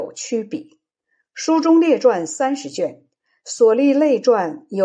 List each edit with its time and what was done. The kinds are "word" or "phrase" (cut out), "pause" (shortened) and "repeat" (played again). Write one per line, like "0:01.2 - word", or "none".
none